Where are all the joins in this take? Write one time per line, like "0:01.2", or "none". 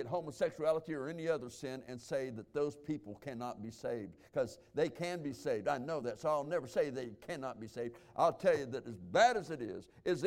none